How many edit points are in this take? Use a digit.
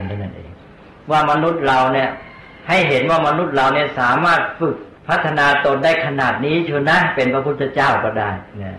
1